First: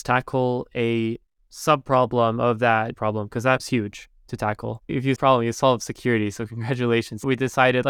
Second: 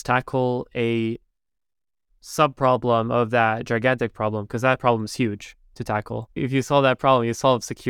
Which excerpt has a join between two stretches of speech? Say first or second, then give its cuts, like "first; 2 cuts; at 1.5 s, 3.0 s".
first; 4 cuts; at 1.3 s, 2.9 s, 3.6 s, 5.2 s